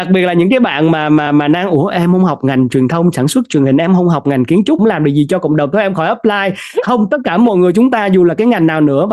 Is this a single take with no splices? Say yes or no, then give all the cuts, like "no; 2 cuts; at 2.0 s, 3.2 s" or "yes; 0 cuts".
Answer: no; 2 cuts; at 1.3 s, 4.8 s